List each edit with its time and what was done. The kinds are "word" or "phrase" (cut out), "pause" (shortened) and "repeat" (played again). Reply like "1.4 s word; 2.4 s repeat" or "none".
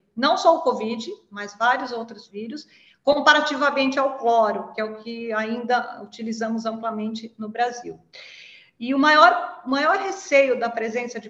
none